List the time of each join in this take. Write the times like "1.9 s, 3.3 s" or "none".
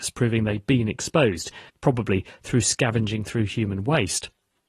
1.7 s